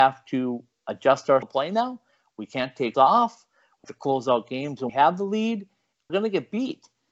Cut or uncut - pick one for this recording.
cut